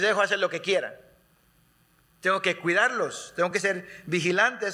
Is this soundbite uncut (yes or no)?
yes